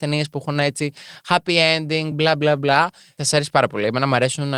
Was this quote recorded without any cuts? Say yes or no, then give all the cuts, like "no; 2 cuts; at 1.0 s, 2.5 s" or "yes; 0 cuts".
yes; 0 cuts